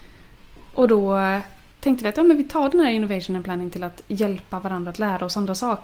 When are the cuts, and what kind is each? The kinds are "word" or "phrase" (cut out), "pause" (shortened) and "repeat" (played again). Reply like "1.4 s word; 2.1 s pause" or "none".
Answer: none